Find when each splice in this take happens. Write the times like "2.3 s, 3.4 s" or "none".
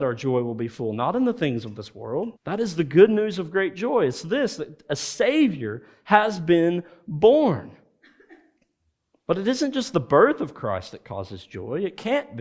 2.4 s